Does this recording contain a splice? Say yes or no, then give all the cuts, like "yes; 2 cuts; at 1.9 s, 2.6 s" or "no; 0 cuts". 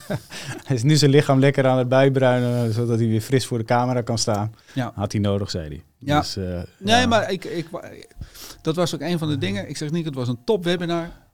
yes; 1 cut; at 4.6 s